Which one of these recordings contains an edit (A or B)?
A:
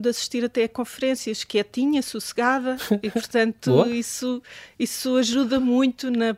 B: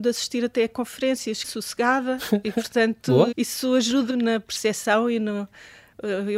B